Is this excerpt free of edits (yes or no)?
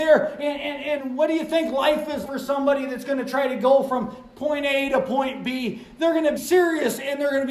no